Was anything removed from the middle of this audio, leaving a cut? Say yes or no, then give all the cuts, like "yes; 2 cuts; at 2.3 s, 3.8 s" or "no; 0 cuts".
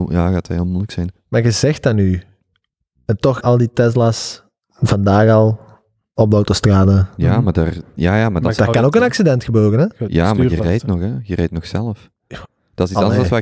yes; 1 cut; at 3.4 s